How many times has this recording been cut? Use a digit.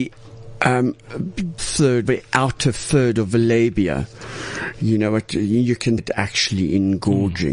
3